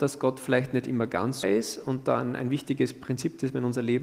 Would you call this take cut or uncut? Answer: cut